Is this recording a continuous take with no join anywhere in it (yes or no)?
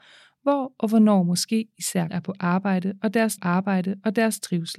no